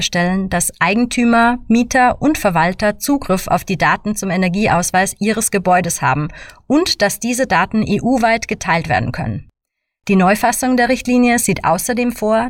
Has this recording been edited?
no; 0 cuts

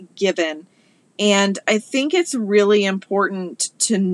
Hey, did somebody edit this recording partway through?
no; 0 cuts

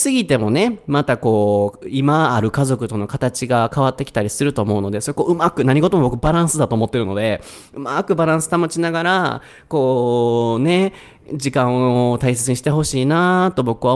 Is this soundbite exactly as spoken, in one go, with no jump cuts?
yes; 0 cuts

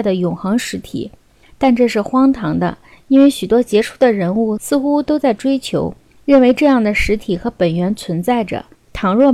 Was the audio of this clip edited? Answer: no; 0 cuts

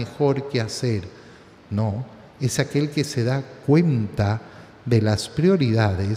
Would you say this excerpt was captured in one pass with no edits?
yes; 0 cuts

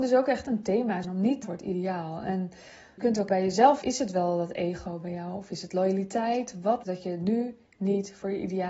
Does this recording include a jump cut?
yes; 6 cuts; at 1.0 s, 1.4 s, 3.0 s, 3.3 s, 3.8 s, 6.8 s

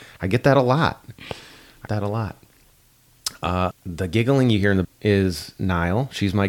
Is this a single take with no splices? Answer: no; 3 cuts; at 1.9 s, 3.7 s, 4.8 s

